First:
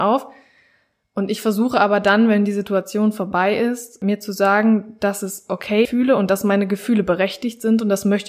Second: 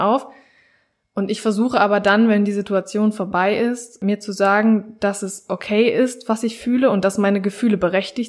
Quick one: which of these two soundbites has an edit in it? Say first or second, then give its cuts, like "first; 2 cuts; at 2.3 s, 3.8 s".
first; 1 cut; at 5.8 s